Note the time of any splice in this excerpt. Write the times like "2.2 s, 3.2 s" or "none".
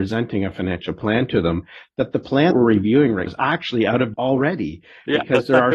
2.5 s, 3.3 s, 4.1 s